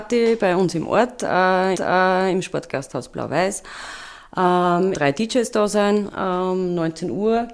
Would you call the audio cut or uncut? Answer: cut